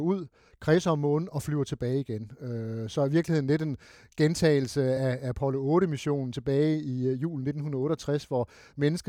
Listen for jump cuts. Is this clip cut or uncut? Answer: uncut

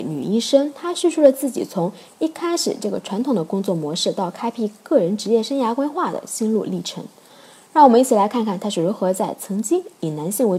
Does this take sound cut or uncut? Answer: uncut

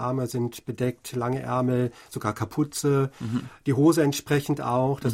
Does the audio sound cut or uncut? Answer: uncut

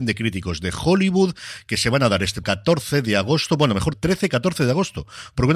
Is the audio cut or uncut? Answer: cut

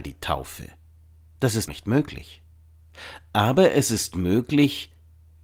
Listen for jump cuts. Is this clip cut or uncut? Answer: cut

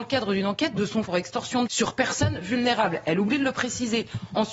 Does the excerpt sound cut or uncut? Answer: cut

